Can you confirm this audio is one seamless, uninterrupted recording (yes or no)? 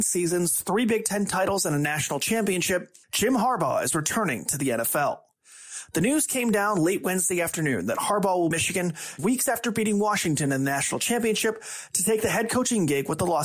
no